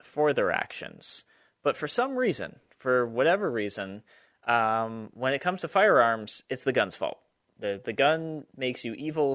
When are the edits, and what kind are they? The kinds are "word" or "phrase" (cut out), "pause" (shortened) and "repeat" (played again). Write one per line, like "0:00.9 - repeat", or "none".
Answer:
none